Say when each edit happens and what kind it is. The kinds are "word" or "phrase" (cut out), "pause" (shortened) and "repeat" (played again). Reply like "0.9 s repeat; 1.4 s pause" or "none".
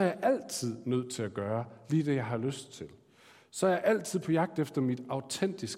none